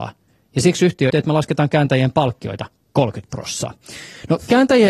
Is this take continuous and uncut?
no; 1 cut; at 1.1 s

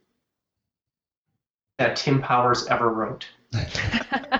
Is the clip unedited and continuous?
no; 1 cut; at 1.8 s

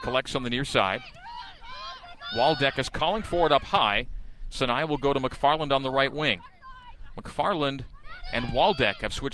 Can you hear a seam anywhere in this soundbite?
no; 0 cuts

